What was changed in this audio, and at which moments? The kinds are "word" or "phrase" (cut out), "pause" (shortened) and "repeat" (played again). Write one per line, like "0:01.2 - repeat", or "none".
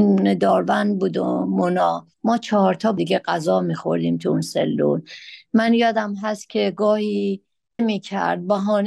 0:02.1 - pause
0:03.0 - word
0:07.8 - word